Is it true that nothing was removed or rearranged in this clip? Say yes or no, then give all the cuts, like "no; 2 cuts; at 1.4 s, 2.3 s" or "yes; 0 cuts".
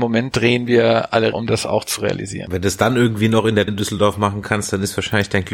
no; 2 cuts; at 1.3 s, 3.7 s